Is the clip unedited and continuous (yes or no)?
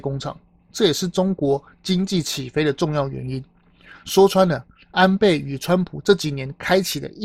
yes